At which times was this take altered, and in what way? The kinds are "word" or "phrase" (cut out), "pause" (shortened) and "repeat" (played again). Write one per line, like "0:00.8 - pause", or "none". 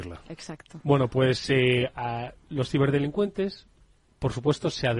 none